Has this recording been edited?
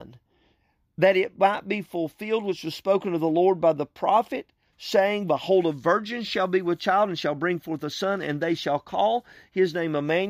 no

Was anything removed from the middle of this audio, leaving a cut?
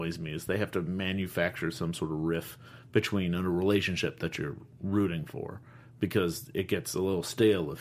no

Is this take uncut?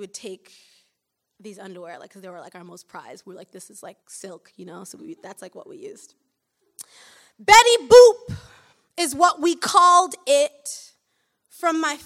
no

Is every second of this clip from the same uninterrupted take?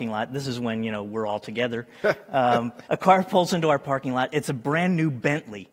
no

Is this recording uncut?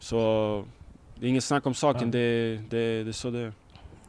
yes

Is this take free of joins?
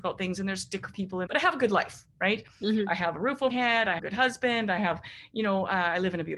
no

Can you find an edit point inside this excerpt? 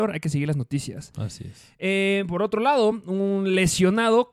no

